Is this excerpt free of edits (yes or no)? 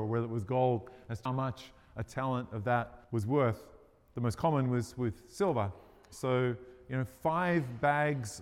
no